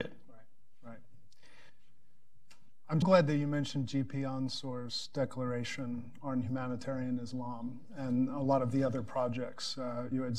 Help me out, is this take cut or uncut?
cut